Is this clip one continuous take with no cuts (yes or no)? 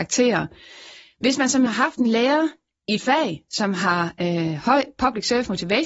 no